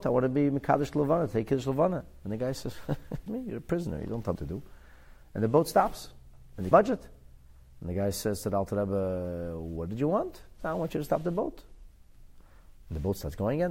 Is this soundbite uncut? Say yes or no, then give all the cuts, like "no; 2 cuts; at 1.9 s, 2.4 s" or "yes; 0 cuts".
no; 3 cuts; at 3.3 s, 4.4 s, 6.7 s